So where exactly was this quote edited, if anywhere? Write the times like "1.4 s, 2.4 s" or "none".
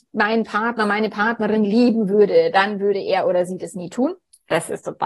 none